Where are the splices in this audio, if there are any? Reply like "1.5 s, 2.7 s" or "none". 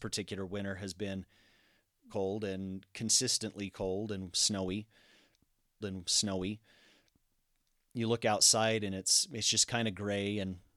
2.1 s, 5.8 s